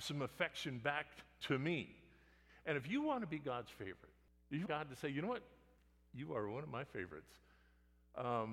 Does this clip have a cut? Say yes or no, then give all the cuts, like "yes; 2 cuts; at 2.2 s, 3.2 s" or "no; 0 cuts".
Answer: yes; 1 cut; at 4.7 s